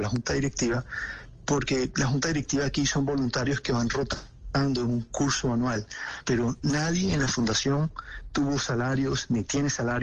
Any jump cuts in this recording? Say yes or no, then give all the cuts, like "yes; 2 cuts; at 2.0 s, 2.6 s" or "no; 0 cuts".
no; 0 cuts